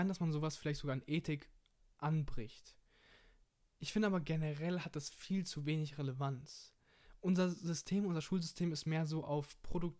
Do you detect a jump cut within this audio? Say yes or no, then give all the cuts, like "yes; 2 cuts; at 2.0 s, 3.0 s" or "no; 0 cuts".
no; 0 cuts